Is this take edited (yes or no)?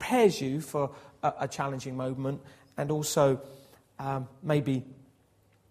no